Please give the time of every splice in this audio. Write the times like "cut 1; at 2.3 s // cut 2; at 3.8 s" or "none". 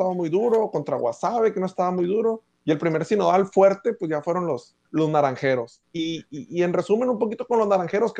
cut 1; at 2.5 s // cut 2; at 4.8 s